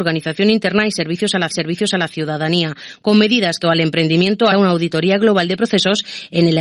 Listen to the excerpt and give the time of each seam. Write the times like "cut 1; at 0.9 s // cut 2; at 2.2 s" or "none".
cut 1; at 1.5 s // cut 2; at 3.6 s // cut 3; at 4.5 s